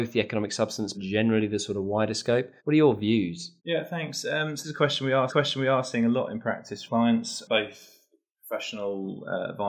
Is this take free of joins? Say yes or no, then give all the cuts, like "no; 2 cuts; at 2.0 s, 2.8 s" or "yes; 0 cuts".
no; 6 cuts; at 0.9 s, 2.6 s, 3.6 s, 4.6 s, 5.3 s, 6.9 s